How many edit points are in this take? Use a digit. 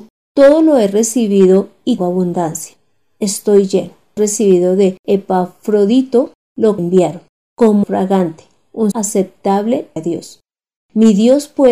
6